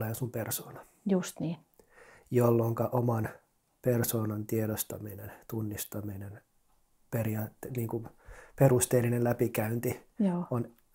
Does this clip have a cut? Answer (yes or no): no